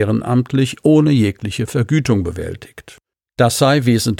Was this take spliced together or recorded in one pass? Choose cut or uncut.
uncut